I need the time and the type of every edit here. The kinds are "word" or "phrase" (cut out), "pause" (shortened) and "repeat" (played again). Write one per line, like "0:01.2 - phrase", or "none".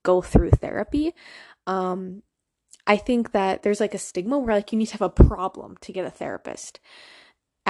none